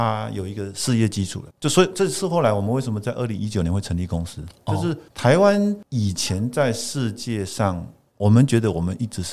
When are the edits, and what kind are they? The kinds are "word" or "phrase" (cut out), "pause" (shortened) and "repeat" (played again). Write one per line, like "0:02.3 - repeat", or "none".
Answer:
0:01.5 - pause